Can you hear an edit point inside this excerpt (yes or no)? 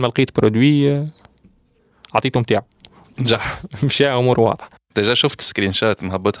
no